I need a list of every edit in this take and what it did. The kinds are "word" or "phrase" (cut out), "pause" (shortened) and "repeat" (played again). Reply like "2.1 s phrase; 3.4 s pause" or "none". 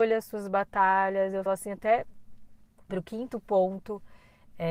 1.5 s word; 2.9 s word